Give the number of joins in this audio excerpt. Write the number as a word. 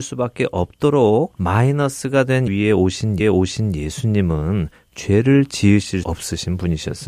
three